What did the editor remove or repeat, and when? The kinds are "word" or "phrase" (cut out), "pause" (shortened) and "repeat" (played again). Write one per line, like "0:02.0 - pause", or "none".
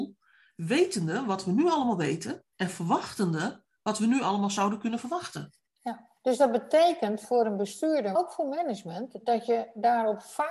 0:02.5 - pause
0:06.2 - pause
0:08.2 - word